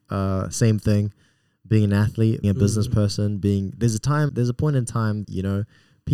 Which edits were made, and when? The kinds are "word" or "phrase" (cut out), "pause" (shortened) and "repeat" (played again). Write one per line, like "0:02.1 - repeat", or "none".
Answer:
0:02.4 - word
0:04.3 - word
0:05.2 - word